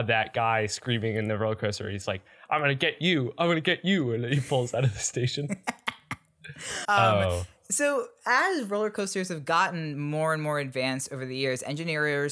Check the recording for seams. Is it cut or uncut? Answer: cut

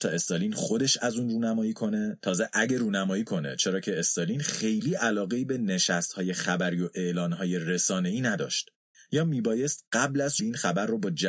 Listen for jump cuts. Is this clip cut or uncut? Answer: cut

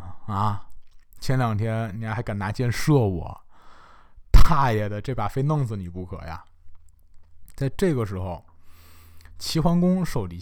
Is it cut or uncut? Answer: uncut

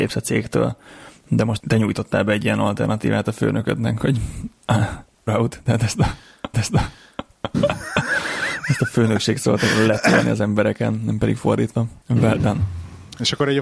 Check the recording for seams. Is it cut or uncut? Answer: cut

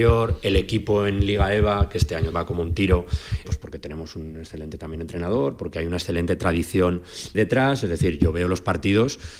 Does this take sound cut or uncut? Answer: cut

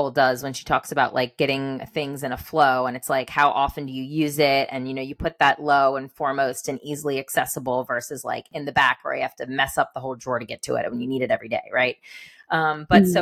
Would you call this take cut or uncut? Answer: uncut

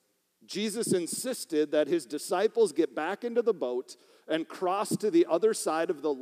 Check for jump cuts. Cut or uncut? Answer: uncut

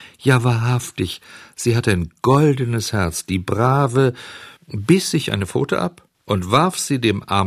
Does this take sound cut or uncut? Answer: cut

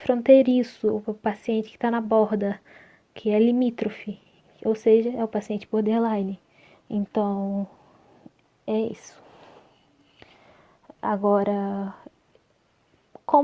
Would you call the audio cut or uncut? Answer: cut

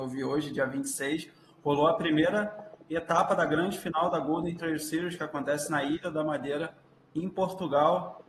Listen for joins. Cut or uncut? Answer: uncut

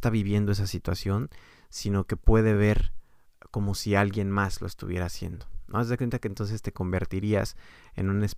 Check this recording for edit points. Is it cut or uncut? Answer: uncut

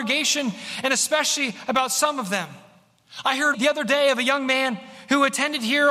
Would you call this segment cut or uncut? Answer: cut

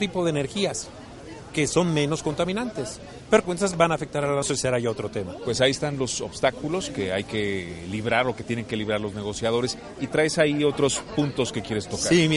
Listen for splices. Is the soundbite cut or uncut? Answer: cut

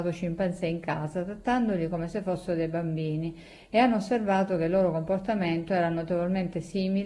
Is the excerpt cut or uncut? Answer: uncut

